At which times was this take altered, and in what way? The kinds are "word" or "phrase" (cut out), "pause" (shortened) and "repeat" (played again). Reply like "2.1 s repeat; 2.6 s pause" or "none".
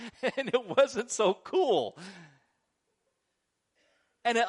none